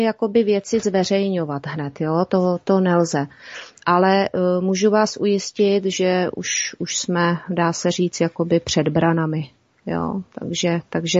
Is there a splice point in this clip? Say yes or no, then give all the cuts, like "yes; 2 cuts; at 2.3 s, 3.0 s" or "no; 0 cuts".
no; 0 cuts